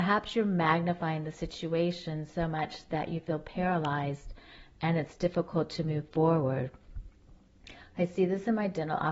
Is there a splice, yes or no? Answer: no